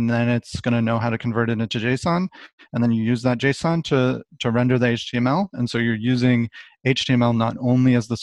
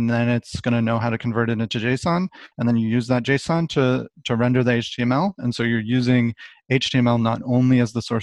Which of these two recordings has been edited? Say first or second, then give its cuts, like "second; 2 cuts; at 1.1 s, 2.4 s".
second; 1 cut; at 2.5 s